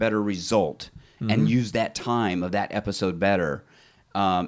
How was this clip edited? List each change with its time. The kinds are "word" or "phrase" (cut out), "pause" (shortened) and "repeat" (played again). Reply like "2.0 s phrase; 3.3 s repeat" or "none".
none